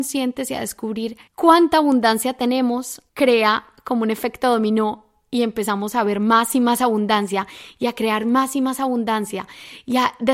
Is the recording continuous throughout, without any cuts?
no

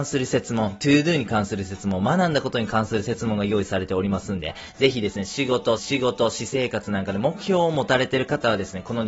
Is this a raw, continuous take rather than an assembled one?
no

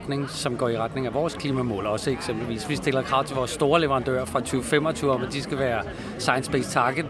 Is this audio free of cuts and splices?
yes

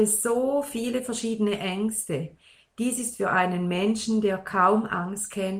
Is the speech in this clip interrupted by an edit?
no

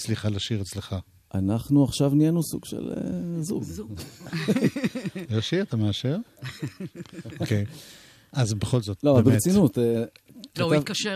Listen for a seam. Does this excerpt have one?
no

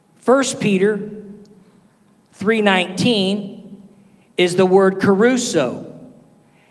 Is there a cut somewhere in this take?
no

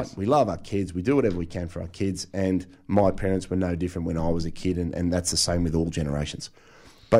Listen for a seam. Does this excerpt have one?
no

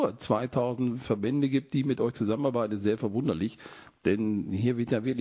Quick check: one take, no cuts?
no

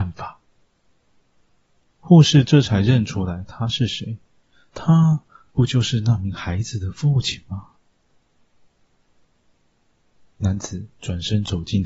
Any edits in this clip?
no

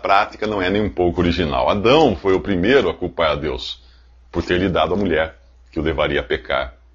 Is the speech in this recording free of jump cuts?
yes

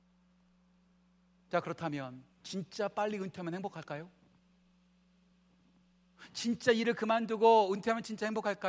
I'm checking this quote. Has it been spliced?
yes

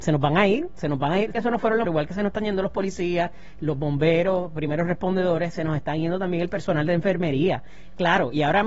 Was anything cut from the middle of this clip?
yes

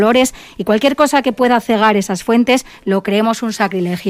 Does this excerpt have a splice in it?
no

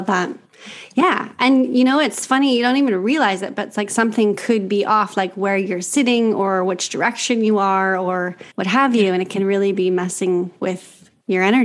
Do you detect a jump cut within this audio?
yes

